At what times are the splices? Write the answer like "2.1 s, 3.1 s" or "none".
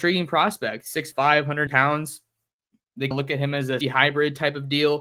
1.1 s, 1.7 s, 3.1 s, 3.8 s